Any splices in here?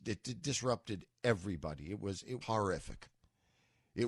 yes; 1 cut; at 2.4 s

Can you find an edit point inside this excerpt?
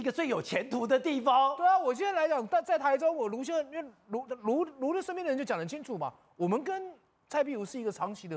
no; 0 cuts

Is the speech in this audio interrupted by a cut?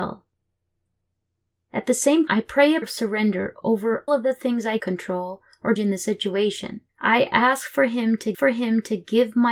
yes; 7 cuts; at 2.3 s, 2.8 s, 4.1 s, 4.8 s, 5.8 s, 6.9 s, 8.3 s

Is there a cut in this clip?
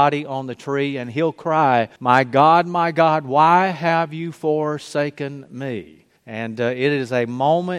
yes; 2 cuts; at 2.0 s, 6.2 s

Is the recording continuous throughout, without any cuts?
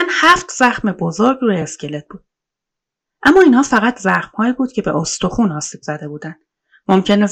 yes; 0 cuts

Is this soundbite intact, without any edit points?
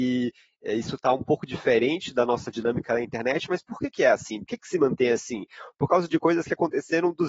yes; 0 cuts

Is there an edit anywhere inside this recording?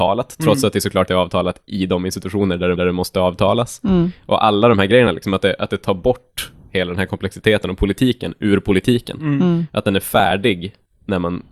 yes; 2 cuts; at 1.1 s, 2.8 s

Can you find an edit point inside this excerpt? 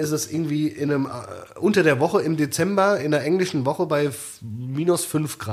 no; 0 cuts

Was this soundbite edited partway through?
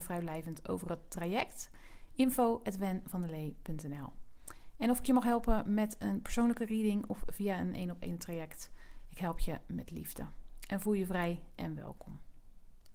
no; 0 cuts

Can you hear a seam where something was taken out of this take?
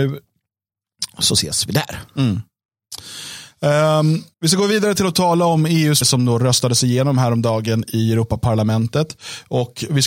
yes; 2 cuts; at 4.3 s, 6.0 s

